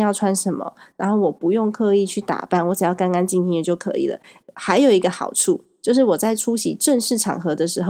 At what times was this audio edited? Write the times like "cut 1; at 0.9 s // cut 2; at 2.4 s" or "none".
none

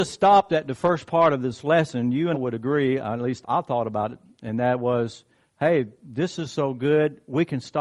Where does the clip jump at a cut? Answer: cut 1; at 2.3 s // cut 2; at 3.4 s

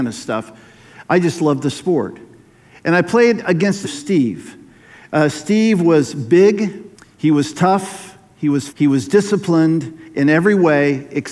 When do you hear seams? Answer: cut 1; at 3.8 s // cut 2; at 6.9 s // cut 3; at 8.7 s

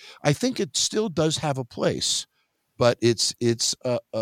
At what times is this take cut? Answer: none

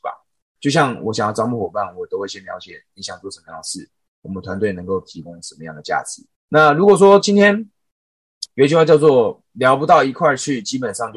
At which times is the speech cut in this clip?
cut 1; at 6.4 s // cut 2; at 8.5 s

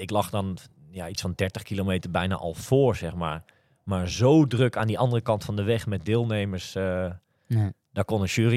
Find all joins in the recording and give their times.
none

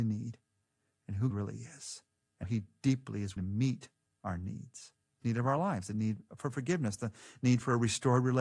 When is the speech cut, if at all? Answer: cut 1; at 1.3 s // cut 2; at 2.4 s // cut 3; at 3.4 s // cut 4; at 5.2 s

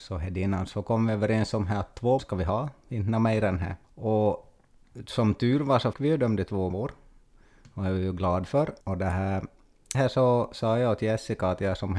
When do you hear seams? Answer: cut 1; at 2.2 s // cut 2; at 3.8 s // cut 3; at 5.9 s // cut 4; at 6.7 s // cut 5; at 8.8 s // cut 6; at 9.9 s

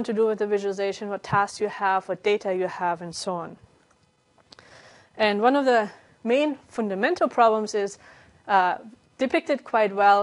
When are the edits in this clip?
none

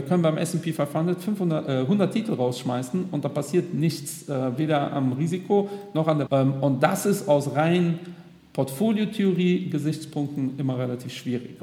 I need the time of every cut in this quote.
cut 1; at 6.3 s

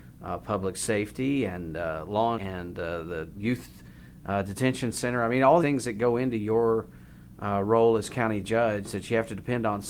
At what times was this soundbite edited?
cut 1; at 2.4 s // cut 2; at 5.6 s

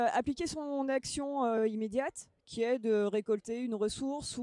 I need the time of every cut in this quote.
none

